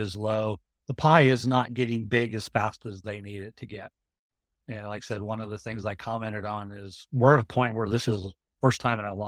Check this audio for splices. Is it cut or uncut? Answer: uncut